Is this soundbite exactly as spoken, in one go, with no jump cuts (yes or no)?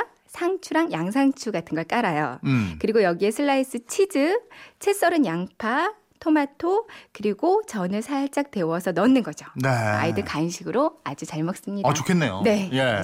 yes